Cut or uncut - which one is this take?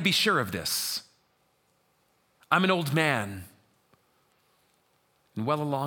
uncut